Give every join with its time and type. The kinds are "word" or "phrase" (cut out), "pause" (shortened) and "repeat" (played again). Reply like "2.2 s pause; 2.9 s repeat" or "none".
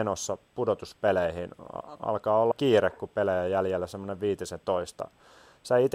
2.5 s word